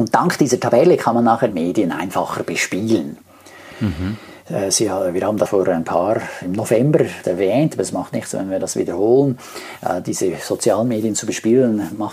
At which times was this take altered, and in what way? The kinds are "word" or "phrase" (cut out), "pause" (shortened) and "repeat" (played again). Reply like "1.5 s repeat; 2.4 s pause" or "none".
1.5 s phrase; 5.5 s word; 7.2 s word